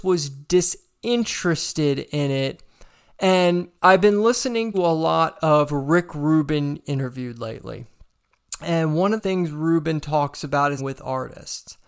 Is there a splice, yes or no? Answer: yes